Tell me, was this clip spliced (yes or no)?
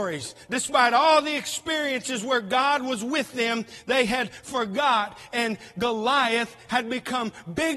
no